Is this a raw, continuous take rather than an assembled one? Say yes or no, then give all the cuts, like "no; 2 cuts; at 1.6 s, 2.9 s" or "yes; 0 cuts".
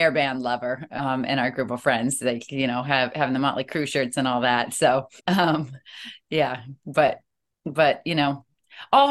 no; 1 cut; at 5.2 s